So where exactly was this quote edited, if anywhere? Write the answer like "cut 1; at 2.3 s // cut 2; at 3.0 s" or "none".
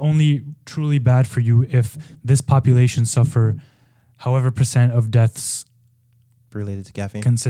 none